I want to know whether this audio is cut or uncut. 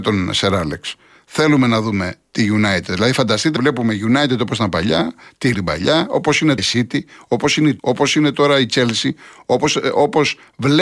cut